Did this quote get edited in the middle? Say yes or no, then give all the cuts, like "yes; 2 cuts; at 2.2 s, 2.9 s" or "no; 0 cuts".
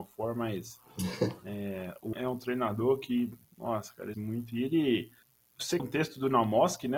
yes; 5 cuts; at 2.1 s, 3.4 s, 4.1 s, 5.2 s, 5.8 s